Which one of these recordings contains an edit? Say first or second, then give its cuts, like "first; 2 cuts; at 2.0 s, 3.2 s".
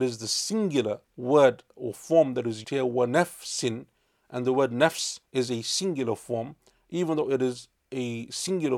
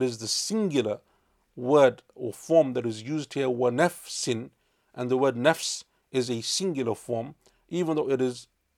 first; 4 cuts; at 1.0 s, 2.6 s, 5.3 s, 7.8 s